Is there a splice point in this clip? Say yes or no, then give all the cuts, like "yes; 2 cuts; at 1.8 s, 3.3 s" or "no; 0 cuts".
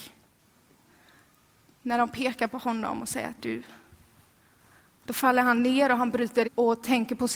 yes; 2 cuts; at 3.4 s, 6.4 s